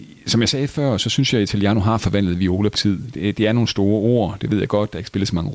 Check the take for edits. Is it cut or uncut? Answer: cut